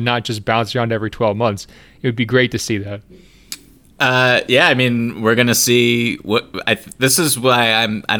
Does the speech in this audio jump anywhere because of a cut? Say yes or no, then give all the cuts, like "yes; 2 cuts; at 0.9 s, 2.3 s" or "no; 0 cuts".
no; 0 cuts